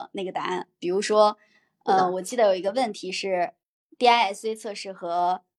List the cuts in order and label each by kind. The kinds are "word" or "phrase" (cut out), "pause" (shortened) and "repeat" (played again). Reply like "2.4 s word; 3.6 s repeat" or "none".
none